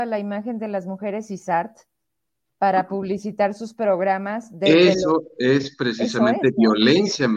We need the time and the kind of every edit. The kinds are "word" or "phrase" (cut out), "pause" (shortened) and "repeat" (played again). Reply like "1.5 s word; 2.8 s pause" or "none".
none